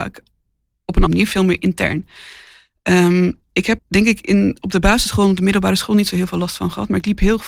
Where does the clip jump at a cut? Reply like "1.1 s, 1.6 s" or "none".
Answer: 1.1 s, 3.8 s